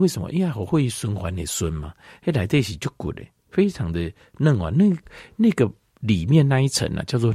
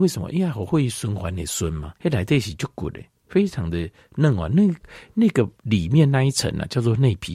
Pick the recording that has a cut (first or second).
second